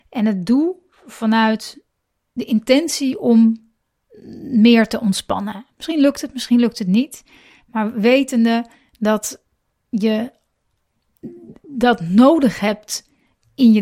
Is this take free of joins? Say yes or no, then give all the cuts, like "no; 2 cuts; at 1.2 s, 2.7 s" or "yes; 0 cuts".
yes; 0 cuts